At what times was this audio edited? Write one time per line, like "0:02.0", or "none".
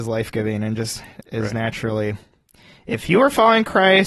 none